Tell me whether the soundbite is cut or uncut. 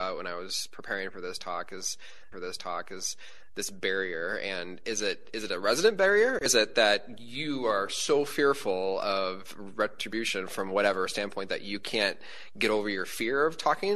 cut